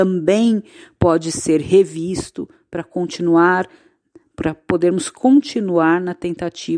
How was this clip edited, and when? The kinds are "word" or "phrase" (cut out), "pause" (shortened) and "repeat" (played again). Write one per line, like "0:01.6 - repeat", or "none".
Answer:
none